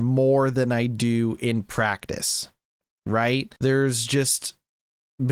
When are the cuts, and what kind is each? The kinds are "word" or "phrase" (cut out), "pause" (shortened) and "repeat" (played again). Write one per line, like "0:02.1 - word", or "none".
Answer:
0:03.6 - pause